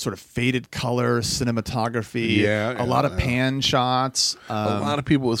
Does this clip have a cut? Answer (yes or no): no